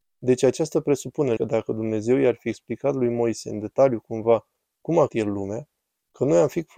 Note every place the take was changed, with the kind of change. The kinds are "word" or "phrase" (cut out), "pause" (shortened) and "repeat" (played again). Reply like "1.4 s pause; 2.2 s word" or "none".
1.4 s word; 5.1 s word